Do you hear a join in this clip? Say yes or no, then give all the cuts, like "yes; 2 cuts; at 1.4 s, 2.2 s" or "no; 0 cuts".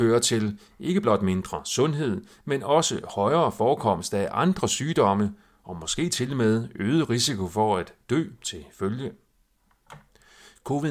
no; 0 cuts